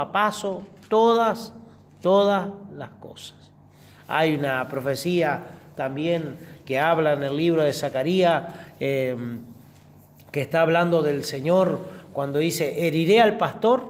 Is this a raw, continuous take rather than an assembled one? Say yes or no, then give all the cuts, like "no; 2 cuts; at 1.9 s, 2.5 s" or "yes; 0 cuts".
yes; 0 cuts